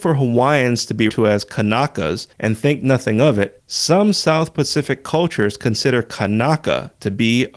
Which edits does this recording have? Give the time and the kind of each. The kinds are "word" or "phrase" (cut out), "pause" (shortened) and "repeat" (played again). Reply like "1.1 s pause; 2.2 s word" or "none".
1.1 s word